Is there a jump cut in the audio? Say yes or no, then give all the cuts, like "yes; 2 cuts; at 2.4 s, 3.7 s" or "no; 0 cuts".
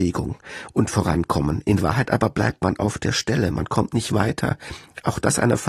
no; 0 cuts